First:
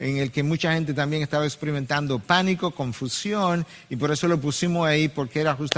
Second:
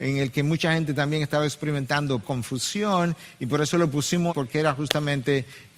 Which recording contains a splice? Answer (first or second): second